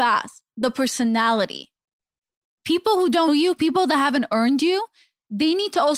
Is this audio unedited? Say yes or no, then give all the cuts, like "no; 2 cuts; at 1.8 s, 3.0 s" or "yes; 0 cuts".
no; 1 cut; at 3.3 s